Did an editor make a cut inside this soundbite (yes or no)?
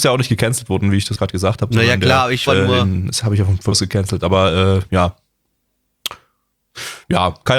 yes